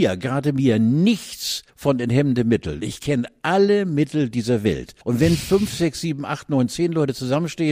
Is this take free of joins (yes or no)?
no